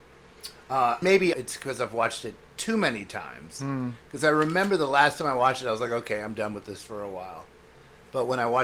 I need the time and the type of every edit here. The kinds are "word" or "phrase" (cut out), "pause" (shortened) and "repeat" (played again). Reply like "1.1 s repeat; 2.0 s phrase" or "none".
1.0 s word; 1.3 s word